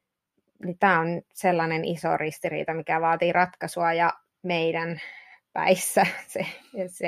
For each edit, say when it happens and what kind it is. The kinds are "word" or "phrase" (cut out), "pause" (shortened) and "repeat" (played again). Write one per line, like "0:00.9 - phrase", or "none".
0:04.3 - pause